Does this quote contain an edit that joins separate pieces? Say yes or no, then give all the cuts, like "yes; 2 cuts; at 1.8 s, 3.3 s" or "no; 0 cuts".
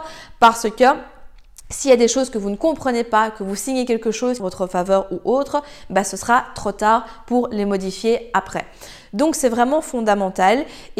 yes; 1 cut; at 4.4 s